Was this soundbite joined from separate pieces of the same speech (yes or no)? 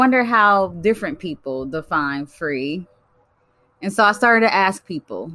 no